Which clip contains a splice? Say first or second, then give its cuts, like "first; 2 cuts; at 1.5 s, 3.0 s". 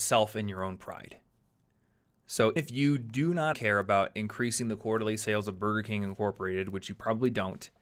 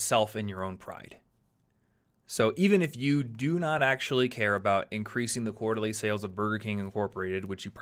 first; 2 cuts; at 2.6 s, 3.5 s